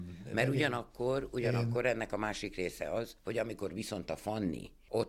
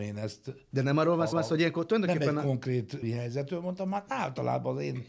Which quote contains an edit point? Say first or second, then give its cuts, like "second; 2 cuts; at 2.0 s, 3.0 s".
second; 2 cuts; at 1.3 s, 3.0 s